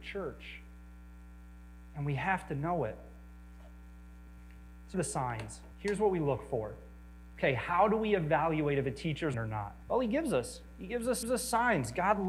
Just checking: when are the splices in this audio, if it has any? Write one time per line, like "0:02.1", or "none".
0:04.9
0:05.7
0:09.3
0:09.8
0:11.2